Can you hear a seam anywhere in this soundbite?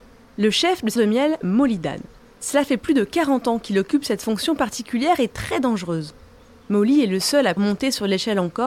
yes; 3 cuts; at 1.0 s, 1.4 s, 7.6 s

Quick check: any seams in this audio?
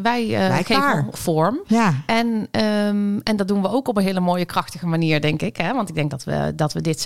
yes; 1 cut; at 1.1 s

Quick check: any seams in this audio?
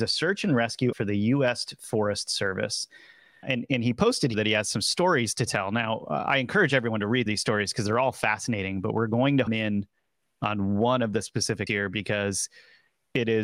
yes; 6 cuts; at 0.9 s, 3.4 s, 4.3 s, 7.3 s, 9.5 s, 11.7 s

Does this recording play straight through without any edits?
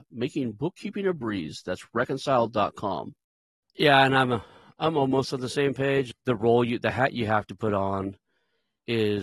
yes; 0 cuts

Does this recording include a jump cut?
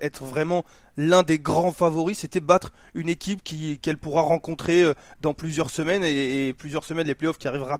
no; 0 cuts

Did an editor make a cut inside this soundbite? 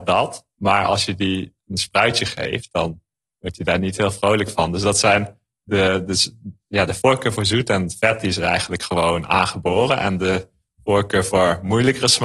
no; 0 cuts

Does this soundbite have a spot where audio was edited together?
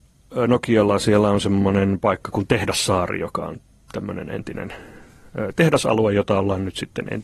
no; 0 cuts

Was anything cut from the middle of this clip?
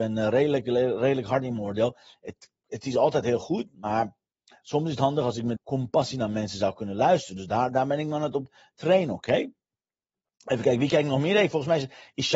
yes; 1 cut; at 5.6 s

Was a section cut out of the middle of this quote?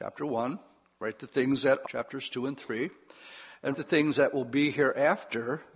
yes; 2 cuts; at 1.8 s, 3.7 s

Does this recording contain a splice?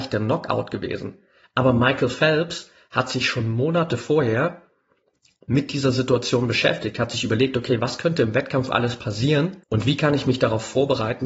yes; 1 cut; at 9.6 s

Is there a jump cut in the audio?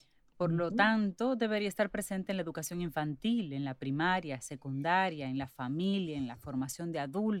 no; 0 cuts

